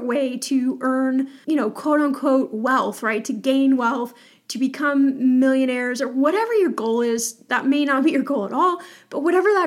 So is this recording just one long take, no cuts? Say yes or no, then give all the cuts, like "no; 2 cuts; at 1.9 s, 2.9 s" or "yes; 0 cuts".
no; 2 cuts; at 1.4 s, 7.5 s